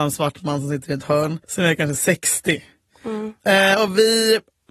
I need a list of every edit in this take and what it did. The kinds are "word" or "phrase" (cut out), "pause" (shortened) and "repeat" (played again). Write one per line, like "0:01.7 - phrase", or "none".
0:01.4 - pause